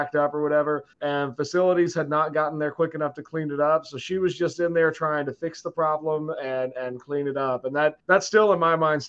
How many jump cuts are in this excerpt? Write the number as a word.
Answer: two